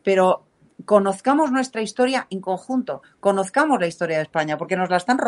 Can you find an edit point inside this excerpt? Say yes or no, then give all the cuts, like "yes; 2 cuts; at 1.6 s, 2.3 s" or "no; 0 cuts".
no; 0 cuts